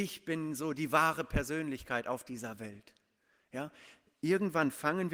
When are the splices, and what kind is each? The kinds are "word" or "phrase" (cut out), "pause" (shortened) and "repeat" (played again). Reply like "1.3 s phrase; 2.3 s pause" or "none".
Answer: none